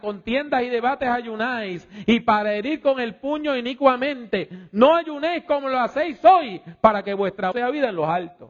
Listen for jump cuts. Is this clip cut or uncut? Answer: cut